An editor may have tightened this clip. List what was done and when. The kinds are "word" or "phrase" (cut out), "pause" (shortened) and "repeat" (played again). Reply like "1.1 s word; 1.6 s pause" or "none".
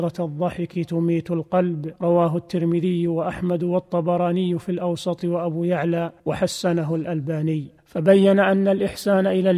2.0 s pause; 6.2 s pause; 7.8 s pause